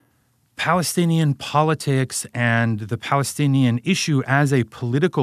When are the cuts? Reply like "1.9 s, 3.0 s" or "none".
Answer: none